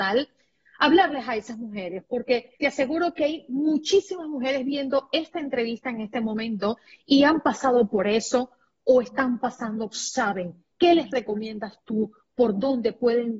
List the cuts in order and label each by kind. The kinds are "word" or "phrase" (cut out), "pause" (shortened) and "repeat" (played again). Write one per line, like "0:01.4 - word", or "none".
0:02.6 - pause
0:09.9 - phrase
0:10.7 - pause

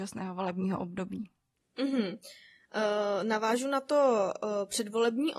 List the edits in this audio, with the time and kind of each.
none

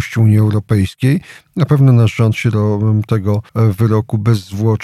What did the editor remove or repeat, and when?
0:03.5 - pause

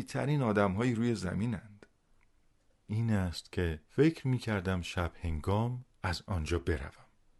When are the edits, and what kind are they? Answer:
0:02.9 - word
0:03.9 - pause

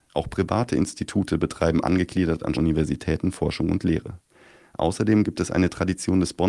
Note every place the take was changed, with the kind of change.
0:02.5 - word

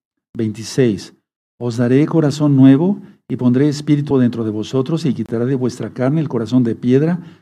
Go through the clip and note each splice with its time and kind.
0:04.1 - word

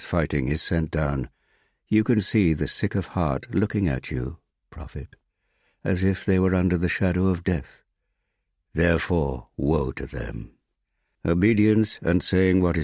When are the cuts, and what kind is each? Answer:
none

